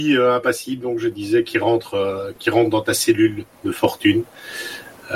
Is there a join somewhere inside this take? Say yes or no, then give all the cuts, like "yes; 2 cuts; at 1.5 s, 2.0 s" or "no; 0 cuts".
yes; 1 cut; at 3.5 s